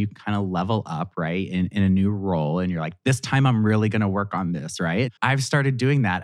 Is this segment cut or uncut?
cut